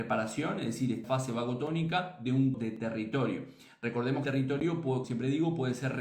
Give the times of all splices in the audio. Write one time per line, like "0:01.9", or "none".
0:01.0
0:02.5
0:04.2
0:05.0